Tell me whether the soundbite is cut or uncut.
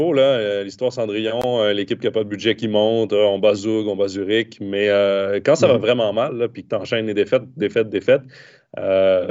uncut